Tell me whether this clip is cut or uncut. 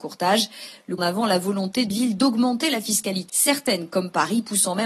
cut